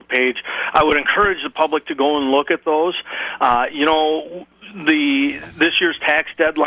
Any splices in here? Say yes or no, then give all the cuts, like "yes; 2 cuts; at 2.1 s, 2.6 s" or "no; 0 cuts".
no; 0 cuts